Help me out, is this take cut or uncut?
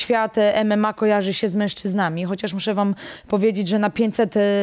uncut